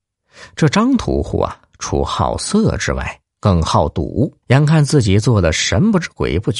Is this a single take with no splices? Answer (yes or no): no